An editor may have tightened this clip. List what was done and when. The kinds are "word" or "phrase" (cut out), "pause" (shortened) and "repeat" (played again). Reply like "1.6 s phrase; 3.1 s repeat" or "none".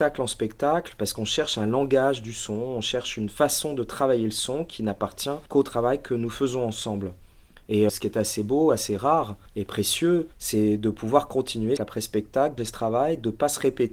5.5 s pause; 7.9 s word; 9.5 s pause; 10.3 s pause; 11.8 s word; 12.6 s word